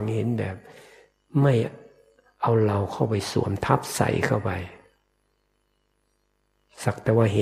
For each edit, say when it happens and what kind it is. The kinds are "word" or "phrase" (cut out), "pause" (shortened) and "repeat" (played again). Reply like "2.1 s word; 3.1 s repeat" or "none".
none